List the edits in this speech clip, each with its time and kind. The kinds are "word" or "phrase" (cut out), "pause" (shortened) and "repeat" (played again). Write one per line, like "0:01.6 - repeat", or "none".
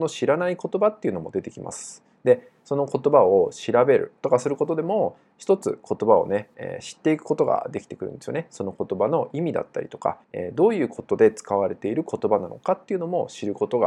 0:04.2 - pause
0:10.2 - pause